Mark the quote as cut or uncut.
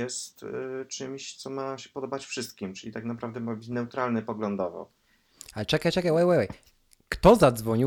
uncut